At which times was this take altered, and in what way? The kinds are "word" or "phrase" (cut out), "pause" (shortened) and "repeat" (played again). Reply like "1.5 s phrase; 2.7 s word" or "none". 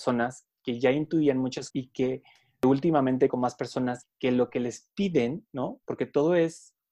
1.7 s word; 3.3 s word

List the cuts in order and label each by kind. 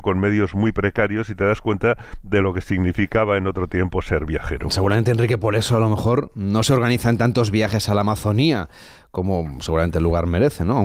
none

